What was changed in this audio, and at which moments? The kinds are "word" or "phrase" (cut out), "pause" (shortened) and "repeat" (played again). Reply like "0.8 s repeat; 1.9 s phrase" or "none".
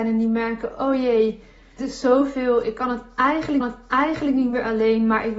1.8 s word; 3.6 s repeat

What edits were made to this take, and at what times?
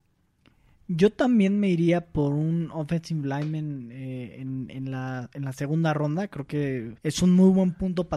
7.0 s pause

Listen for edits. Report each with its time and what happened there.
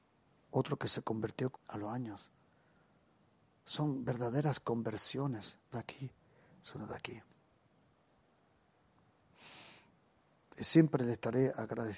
1.5 s word; 5.7 s word

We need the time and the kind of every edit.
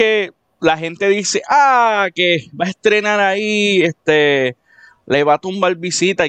none

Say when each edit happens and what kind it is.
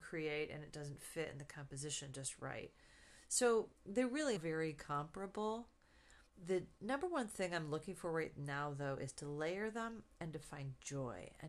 3.8 s pause; 4.4 s word; 6.3 s pause

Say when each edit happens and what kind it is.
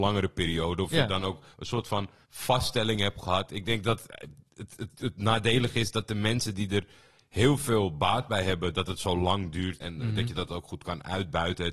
1.5 s pause; 2.2 s pause; 4.5 s pause; 9.8 s word

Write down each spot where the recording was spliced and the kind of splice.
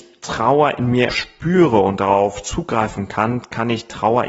1.1 s word

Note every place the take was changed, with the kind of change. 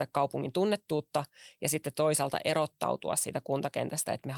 1.9 s word

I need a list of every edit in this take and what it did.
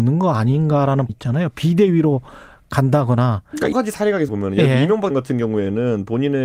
1.1 s word; 3.7 s word; 4.3 s word; 5.1 s word

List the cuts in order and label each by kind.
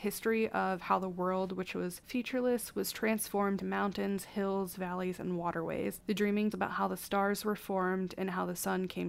3.6 s word; 6.5 s word

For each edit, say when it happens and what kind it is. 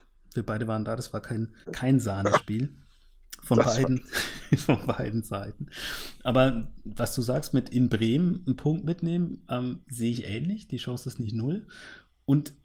1.6 s pause; 9.8 s pause

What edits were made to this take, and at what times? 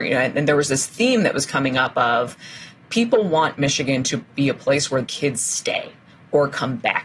5.0 s word

